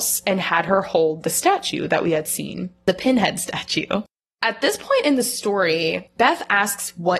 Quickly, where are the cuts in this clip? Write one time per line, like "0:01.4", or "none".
none